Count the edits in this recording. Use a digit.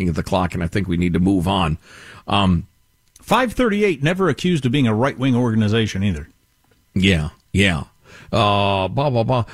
0